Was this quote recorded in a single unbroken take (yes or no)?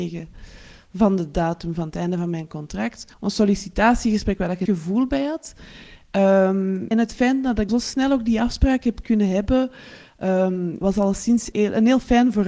no